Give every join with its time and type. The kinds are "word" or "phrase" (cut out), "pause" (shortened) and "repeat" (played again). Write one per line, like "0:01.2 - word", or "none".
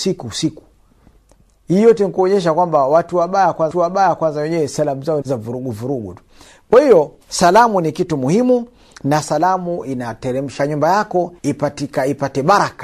0:03.7 - repeat
0:05.2 - phrase
0:07.2 - pause
0:10.6 - phrase
0:11.4 - pause